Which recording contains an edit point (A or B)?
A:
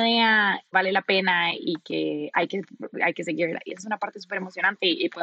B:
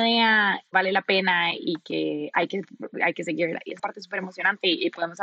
B